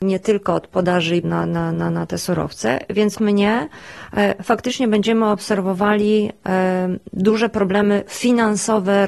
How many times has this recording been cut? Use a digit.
2